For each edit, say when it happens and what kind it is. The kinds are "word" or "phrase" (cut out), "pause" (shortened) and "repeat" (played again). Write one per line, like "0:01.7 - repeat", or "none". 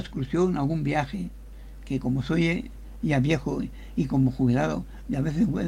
none